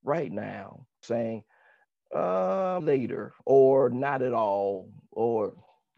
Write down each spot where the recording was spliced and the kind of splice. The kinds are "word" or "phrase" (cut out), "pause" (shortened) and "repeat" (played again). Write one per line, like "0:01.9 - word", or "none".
0:01.0 - phrase
0:02.8 - word
0:03.4 - pause